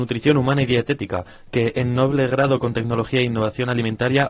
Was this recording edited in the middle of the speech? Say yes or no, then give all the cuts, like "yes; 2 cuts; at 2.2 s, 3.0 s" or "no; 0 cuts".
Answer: no; 0 cuts